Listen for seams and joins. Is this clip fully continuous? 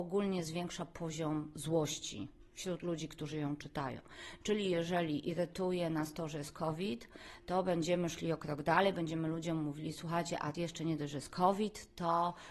no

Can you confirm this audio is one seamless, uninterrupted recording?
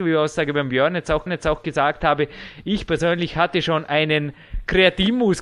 no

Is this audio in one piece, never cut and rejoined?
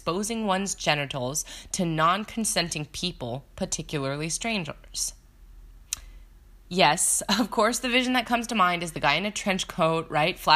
yes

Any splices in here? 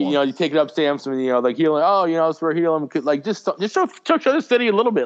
no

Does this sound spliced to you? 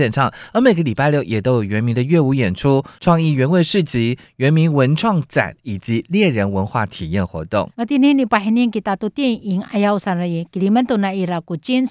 yes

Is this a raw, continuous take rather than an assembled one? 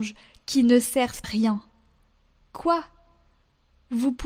no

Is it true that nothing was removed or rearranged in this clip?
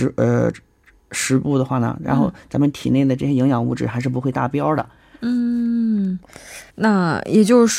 no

